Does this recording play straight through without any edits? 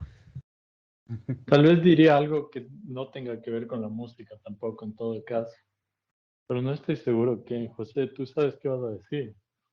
yes; 0 cuts

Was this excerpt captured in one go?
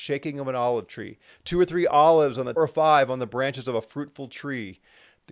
no; 1 cut; at 2.6 s

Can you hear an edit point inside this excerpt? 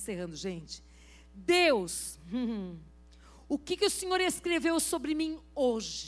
no; 0 cuts

